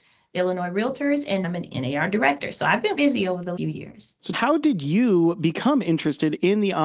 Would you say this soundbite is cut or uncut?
cut